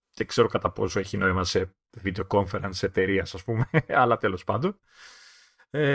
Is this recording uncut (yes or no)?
yes